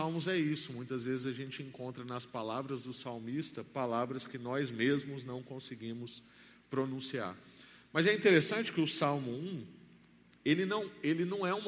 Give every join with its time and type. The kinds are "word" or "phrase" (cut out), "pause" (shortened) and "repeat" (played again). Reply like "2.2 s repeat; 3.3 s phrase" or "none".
none